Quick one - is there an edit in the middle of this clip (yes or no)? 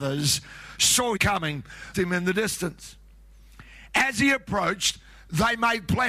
yes